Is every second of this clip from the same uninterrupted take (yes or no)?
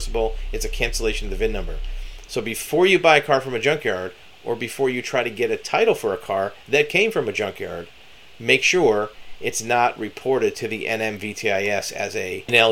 yes